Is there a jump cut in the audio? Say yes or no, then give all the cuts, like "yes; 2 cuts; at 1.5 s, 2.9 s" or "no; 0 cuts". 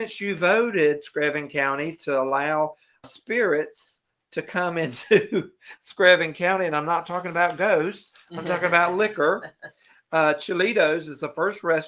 yes; 1 cut; at 3.0 s